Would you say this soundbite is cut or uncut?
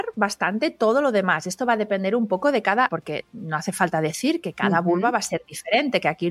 cut